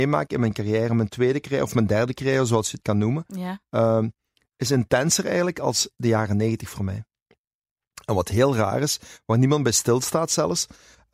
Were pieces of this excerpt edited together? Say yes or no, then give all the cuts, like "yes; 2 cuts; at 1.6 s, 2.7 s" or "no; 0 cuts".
no; 0 cuts